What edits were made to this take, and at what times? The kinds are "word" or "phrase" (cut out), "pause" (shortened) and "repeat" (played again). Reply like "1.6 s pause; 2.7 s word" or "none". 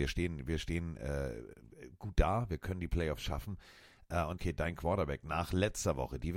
4.3 s phrase